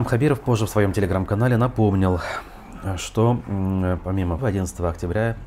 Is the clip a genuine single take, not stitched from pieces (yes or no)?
no